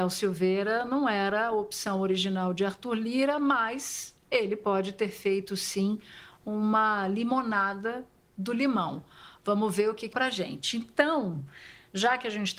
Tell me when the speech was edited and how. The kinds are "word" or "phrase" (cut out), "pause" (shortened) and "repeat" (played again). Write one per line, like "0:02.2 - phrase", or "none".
0:10.1 - phrase